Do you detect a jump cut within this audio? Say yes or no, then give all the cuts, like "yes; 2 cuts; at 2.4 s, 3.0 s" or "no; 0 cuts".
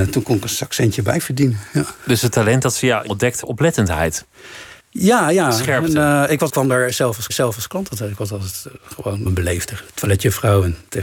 yes; 6 cuts; at 3.1 s, 3.4 s, 4.8 s, 6.5 s, 7.3 s, 9.3 s